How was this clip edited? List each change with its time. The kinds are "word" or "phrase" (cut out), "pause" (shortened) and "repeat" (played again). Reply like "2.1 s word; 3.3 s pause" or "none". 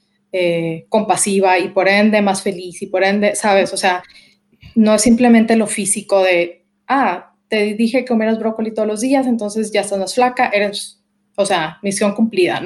none